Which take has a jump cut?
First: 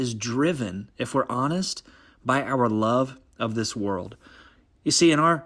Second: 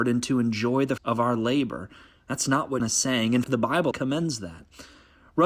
second; 4 cuts; at 1.0 s, 2.8 s, 3.4 s, 3.9 s

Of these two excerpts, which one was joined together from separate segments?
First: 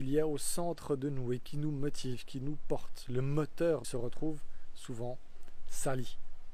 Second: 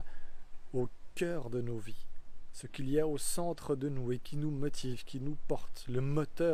first; 1 cut; at 3.8 s

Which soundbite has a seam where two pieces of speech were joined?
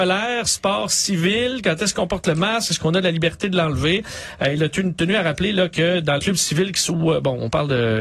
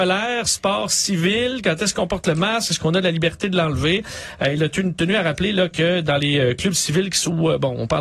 first; 1 cut; at 6.2 s

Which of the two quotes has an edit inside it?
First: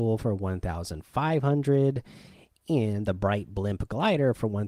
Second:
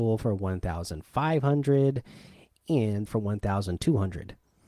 second; 1 cut; at 3.1 s

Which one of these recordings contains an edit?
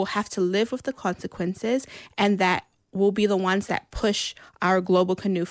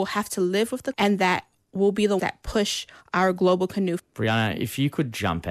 second; 3 cuts; at 0.9 s, 2.2 s, 4.0 s

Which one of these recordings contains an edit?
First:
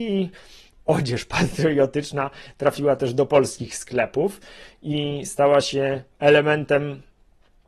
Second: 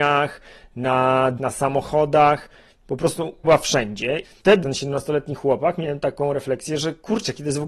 second; 4 cuts; at 1.4 s, 3.4 s, 4.2 s, 4.6 s

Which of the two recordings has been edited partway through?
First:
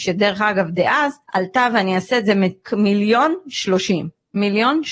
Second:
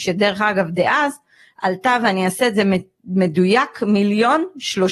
first; 2 cuts; at 1.2 s, 2.6 s

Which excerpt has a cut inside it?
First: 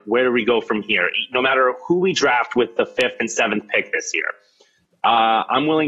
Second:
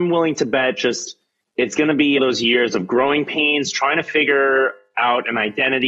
second; 2 cuts; at 1.4 s, 2.2 s

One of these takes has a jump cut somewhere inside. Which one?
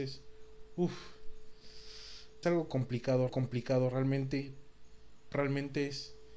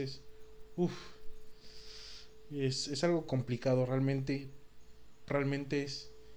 first; 2 cuts; at 2.4 s, 3.3 s

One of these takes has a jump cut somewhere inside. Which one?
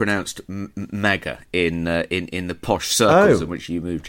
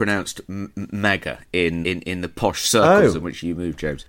second; 1 cut; at 1.8 s

